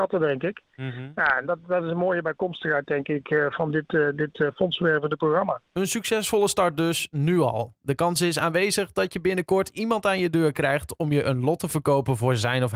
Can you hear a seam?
no; 0 cuts

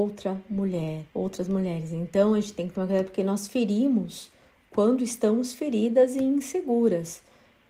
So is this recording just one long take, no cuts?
no; 1 cut; at 1.1 s

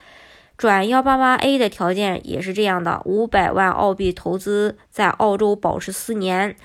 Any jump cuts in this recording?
no; 0 cuts

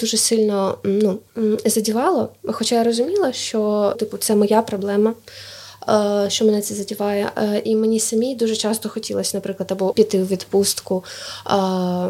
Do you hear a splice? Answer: yes; 2 cuts; at 3.9 s, 9.9 s

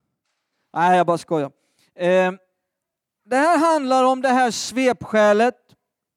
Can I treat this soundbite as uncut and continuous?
yes; 0 cuts

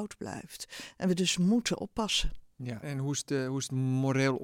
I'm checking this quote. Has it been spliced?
yes; 1 cut; at 2.8 s

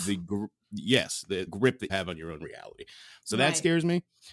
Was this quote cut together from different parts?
yes; 2 cuts; at 1.5 s, 1.9 s

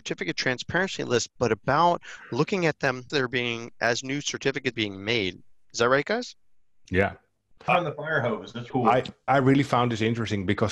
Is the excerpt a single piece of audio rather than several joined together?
no; 5 cuts; at 3.1 s, 4.7 s, 7.7 s, 8.7 s, 9.3 s

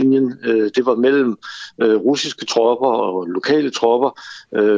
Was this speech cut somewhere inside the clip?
no; 0 cuts

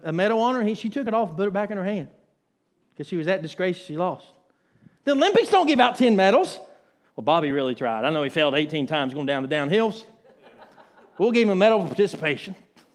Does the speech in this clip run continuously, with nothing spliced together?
yes; 0 cuts

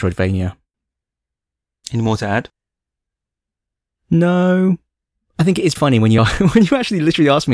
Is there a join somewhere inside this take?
yes; 2 cuts; at 5.8 s, 6.2 s

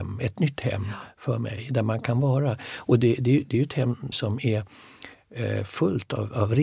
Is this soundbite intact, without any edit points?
no; 1 cut; at 4.1 s

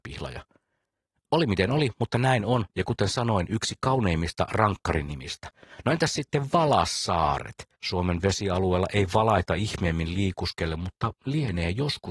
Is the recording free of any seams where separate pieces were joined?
no; 1 cut; at 7.7 s

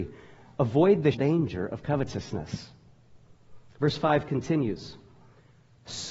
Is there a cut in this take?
yes; 1 cut; at 1.1 s

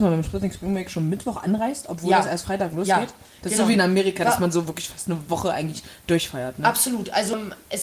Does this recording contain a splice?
no; 0 cuts

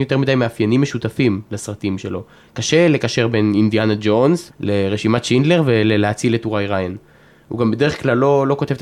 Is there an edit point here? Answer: yes; 1 cut; at 4.5 s

